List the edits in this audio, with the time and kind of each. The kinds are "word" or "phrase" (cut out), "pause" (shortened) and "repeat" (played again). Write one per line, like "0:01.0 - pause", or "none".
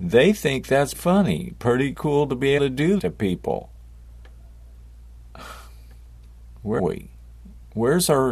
0:00.9 - word
0:01.9 - word
0:02.6 - word
0:03.0 - word
0:06.8 - word

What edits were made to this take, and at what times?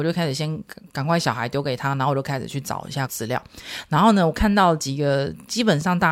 0:03.1 - word

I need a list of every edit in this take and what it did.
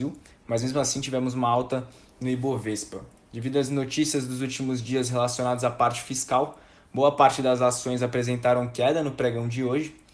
none

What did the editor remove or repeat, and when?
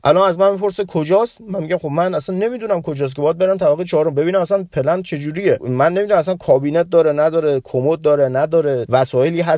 none

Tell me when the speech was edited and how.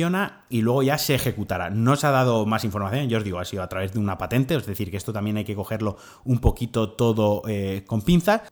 none

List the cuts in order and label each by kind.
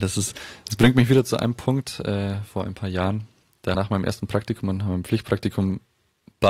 0:03.7 - phrase

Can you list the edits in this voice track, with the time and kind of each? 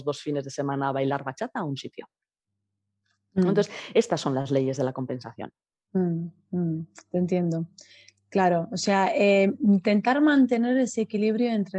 none

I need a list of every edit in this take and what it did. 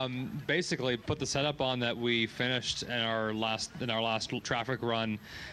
0:04.4 - word

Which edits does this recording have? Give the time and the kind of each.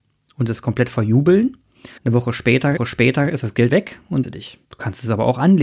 0:02.0 - pause
0:02.8 - repeat
0:03.7 - word
0:04.2 - phrase
0:04.6 - pause

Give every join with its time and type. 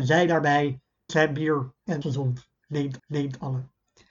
0:01.1 - word
0:02.0 - word
0:03.0 - repeat

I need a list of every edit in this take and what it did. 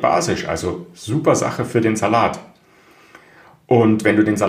none

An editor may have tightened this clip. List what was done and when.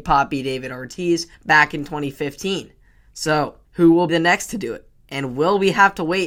0:01.3 - pause
0:03.6 - pause
0:04.1 - word

